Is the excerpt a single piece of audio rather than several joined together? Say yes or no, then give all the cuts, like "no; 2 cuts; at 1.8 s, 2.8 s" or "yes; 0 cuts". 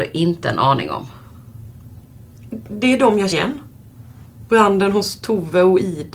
no; 1 cut; at 3.3 s